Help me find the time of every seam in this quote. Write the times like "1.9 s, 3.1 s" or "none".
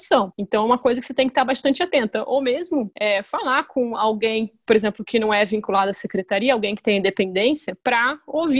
none

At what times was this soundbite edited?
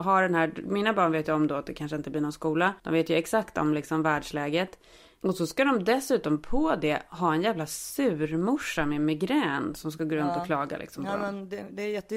2.8 s

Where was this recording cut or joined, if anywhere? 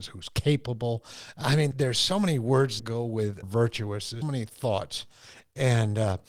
1.7 s, 2.8 s, 3.4 s, 4.2 s

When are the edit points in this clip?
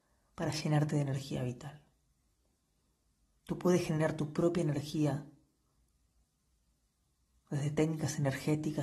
none

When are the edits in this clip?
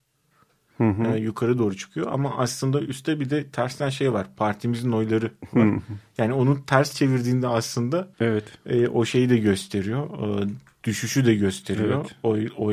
8.1 s

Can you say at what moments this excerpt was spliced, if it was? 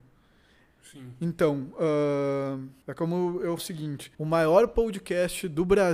2.8 s, 3.6 s, 4.1 s

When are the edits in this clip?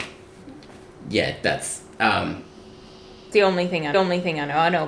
3.3 s, 3.9 s

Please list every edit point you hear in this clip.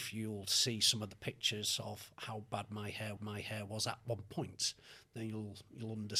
3.2 s

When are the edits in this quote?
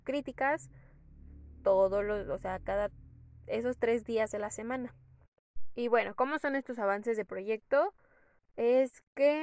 none

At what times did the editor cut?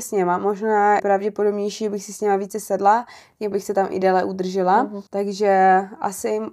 1.0 s, 3.5 s, 5.1 s

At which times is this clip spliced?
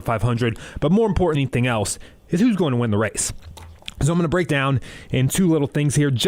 1.3 s, 4.5 s

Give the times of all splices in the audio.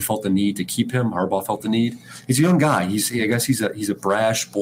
none

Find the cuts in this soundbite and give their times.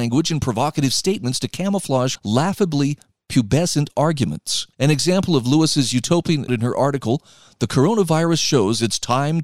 2.2 s, 4.7 s, 6.5 s

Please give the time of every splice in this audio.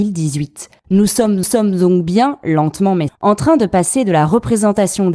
1.4 s, 3.1 s

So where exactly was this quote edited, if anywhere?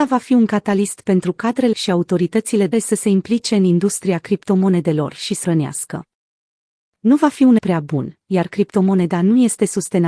1.7 s, 2.7 s, 5.4 s, 7.6 s

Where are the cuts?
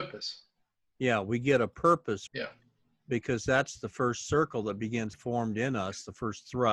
2.3 s, 5.1 s

